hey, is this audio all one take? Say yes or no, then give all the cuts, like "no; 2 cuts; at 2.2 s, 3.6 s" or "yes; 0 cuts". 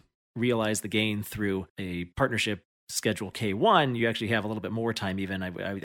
yes; 0 cuts